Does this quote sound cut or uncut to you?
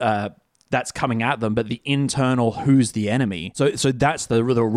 uncut